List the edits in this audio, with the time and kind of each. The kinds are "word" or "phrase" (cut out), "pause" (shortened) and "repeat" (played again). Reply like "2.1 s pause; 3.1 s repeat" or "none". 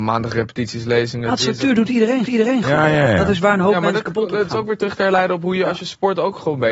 2.3 s repeat